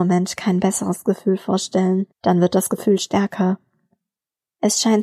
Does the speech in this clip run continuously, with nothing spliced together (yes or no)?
no